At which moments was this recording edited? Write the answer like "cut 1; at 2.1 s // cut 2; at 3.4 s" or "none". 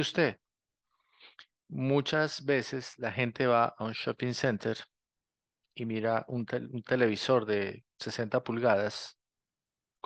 none